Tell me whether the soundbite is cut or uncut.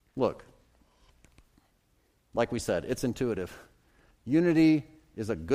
uncut